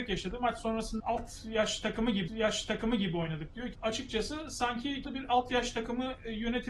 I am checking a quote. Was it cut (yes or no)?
yes